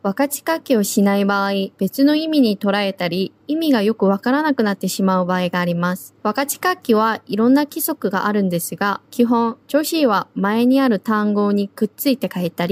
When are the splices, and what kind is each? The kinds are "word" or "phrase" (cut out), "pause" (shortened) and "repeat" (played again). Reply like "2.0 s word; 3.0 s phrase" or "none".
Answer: 1.7 s pause; 3.4 s pause; 6.2 s pause; 9.1 s pause; 9.6 s pause